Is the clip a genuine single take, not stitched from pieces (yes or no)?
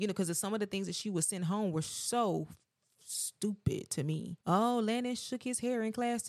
no